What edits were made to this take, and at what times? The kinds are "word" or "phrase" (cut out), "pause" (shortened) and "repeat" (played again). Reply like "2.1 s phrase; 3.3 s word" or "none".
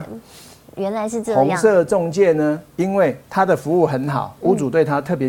2.7 s pause; 3.2 s pause